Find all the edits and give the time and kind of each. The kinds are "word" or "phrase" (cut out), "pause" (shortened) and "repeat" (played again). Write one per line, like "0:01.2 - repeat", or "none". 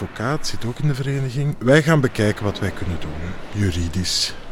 none